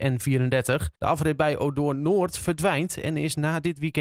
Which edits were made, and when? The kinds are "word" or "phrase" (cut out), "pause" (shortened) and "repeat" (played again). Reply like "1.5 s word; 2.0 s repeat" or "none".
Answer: 1.0 s pause

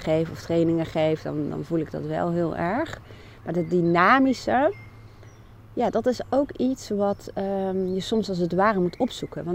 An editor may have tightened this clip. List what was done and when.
none

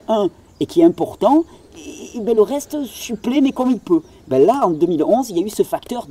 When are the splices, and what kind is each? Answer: none

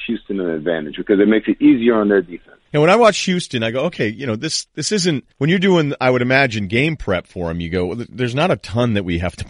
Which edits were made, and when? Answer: 2.7 s pause; 5.3 s pause

